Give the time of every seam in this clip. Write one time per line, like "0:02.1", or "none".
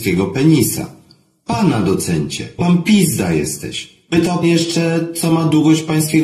0:02.6
0:04.4

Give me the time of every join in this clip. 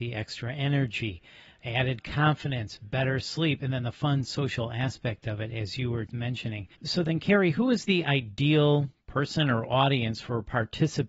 0:06.1
0:06.8

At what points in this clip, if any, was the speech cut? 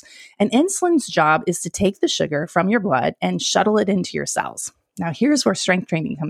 none

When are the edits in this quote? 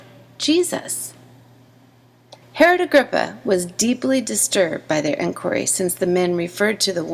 0:02.4

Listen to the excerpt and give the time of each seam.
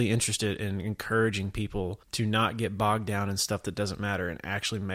0:02.0

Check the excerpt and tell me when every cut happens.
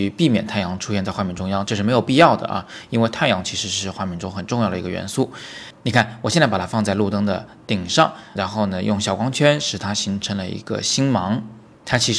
0:08.4

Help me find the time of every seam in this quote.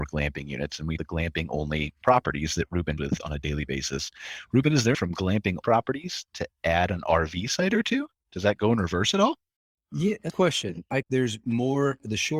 0:01.0
0:03.0
0:04.9
0:05.6
0:08.1
0:09.6
0:10.3
0:11.0

